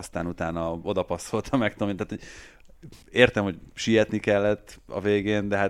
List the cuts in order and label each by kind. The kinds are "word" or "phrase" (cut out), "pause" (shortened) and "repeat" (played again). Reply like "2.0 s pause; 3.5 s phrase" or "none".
3.0 s pause